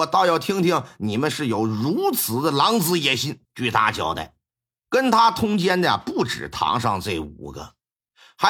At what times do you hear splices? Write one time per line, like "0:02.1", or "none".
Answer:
0:03.4
0:04.5

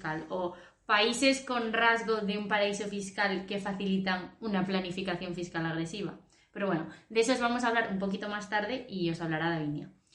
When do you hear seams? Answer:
none

